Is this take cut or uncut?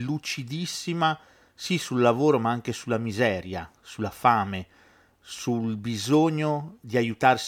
uncut